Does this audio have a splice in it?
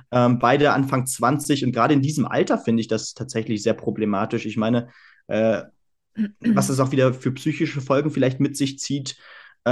no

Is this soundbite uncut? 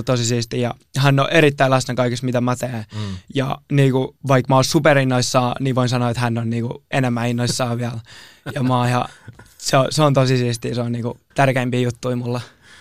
no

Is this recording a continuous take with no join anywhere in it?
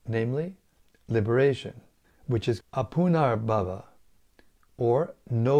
no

